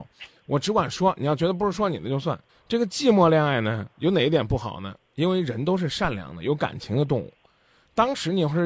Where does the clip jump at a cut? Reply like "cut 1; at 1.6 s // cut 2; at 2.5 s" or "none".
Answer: cut 1; at 2.5 s // cut 2; at 3.9 s